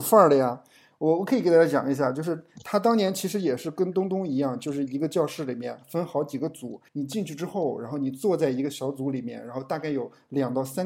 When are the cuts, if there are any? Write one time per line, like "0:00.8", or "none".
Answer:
0:06.9

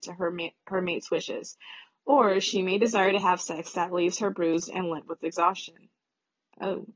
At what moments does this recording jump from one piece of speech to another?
none

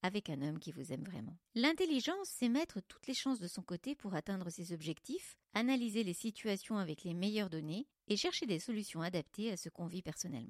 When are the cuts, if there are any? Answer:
0:01.5

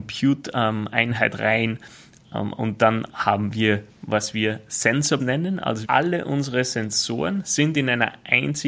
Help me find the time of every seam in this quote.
0:05.2
0:05.8

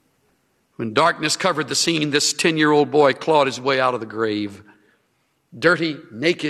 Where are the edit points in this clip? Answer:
none

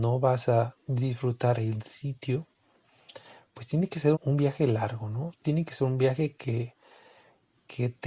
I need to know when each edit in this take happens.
0:04.1

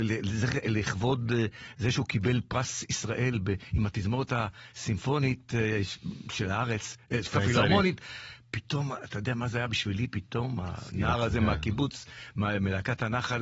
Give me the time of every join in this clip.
0:07.3

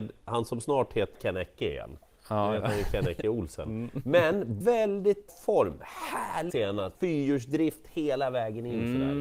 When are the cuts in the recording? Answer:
0:01.1
0:04.6
0:05.3
0:06.5
0:06.9

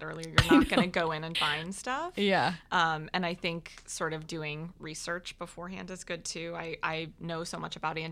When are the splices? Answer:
0:01.3

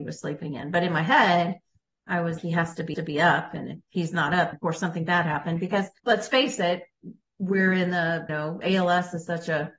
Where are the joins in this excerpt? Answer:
0:02.4
0:02.9
0:04.5
0:06.0
0:08.3

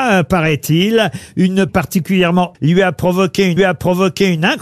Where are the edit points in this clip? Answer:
0:01.7
0:02.5
0:03.6

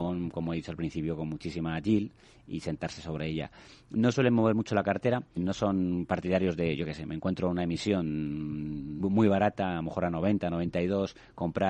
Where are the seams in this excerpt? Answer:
0:05.4
0:09.0

